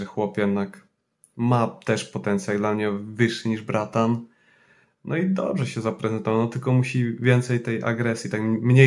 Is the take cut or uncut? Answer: uncut